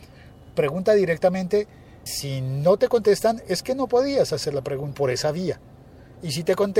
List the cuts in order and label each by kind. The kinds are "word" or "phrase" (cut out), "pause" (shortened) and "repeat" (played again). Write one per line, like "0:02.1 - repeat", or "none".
0:02.1 - word
0:04.9 - phrase